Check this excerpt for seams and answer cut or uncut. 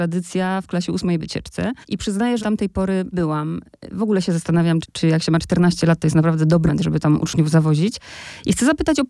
cut